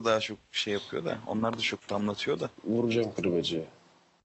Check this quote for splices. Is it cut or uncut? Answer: cut